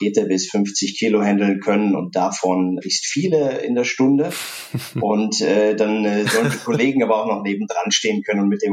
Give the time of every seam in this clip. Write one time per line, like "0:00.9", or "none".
none